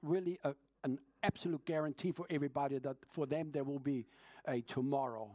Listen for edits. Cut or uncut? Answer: uncut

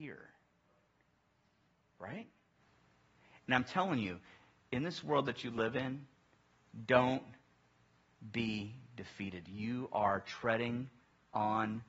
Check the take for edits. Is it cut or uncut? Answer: uncut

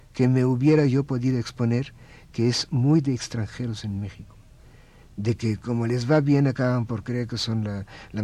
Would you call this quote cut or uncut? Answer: uncut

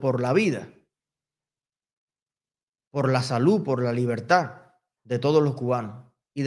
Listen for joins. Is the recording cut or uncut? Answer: uncut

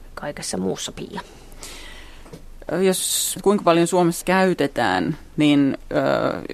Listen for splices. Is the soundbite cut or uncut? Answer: cut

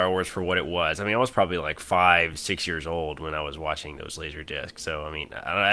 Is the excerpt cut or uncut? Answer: uncut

